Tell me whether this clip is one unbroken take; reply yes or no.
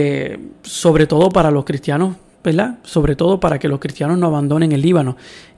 yes